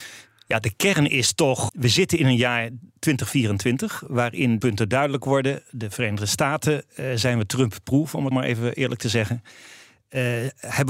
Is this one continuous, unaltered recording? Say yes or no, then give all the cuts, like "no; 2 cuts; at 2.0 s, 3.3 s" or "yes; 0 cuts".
no; 3 cuts; at 1.7 s, 4.6 s, 8.3 s